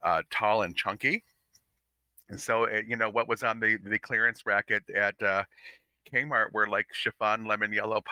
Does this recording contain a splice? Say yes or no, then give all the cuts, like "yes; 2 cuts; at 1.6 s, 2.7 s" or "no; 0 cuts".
no; 0 cuts